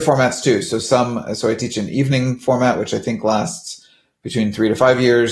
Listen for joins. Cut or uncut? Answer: uncut